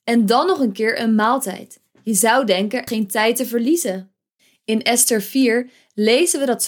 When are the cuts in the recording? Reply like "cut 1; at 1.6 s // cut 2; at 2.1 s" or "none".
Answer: cut 1; at 2.9 s